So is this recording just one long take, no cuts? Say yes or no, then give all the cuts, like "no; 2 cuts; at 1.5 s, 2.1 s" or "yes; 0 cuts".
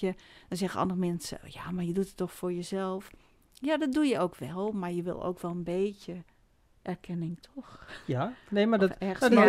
yes; 0 cuts